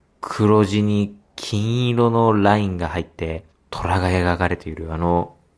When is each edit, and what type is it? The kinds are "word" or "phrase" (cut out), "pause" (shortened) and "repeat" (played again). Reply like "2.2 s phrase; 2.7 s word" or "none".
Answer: 3.5 s pause